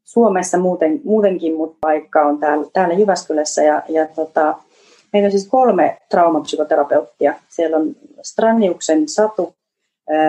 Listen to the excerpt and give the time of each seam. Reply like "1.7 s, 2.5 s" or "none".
none

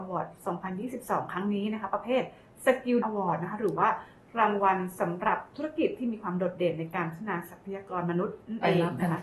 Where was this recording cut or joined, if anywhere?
3.0 s

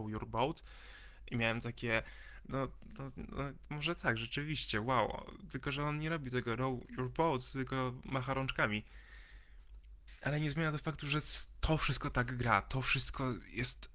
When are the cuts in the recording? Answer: none

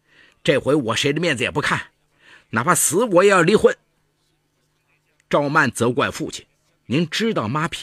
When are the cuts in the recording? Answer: 6.5 s

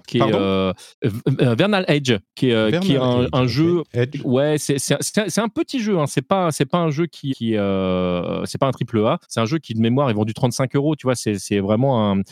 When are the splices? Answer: 0.9 s, 7.3 s, 9.2 s

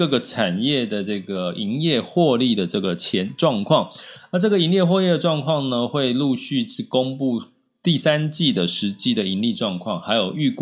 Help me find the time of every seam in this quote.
none

